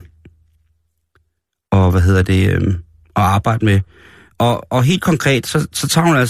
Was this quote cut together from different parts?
no; 0 cuts

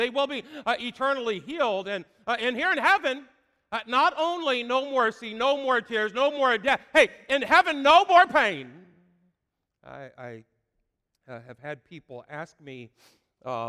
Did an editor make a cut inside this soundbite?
no; 0 cuts

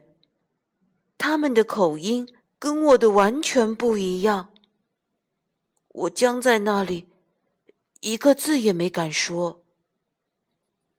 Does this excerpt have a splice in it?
yes; 1 cut; at 2.4 s

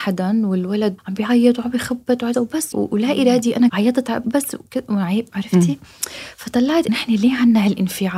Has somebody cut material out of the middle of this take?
yes; 6 cuts; at 1.0 s, 2.3 s, 2.7 s, 3.7 s, 4.2 s, 6.9 s

